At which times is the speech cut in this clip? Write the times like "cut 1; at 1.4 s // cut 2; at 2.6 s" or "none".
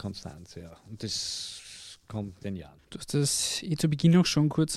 cut 1; at 2.4 s // cut 2; at 2.8 s